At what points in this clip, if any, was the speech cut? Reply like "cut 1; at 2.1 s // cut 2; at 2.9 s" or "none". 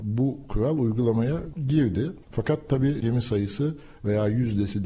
cut 1; at 2.2 s // cut 2; at 3.0 s